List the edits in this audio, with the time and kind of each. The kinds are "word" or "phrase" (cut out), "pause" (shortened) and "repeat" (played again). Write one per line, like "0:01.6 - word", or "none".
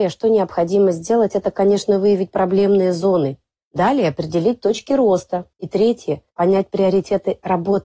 0:03.6 - pause
0:05.5 - pause
0:06.3 - pause